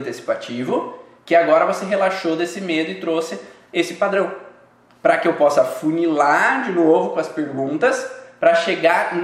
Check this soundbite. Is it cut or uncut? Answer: uncut